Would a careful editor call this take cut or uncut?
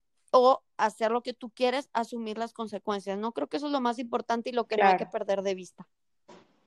uncut